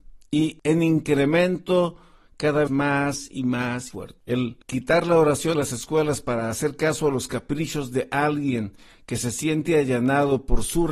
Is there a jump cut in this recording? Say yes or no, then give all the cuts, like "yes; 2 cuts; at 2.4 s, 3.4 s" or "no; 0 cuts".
yes; 3 cuts; at 2.7 s, 3.9 s, 5.5 s